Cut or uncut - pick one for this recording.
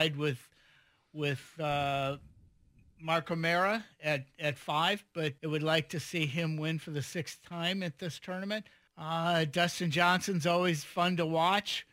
cut